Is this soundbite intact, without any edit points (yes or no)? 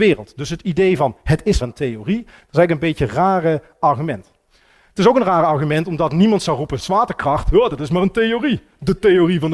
no